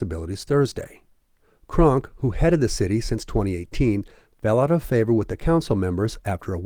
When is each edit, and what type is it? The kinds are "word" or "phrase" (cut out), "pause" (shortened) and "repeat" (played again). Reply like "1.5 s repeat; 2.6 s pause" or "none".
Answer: none